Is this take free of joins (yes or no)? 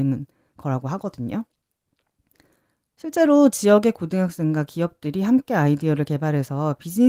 yes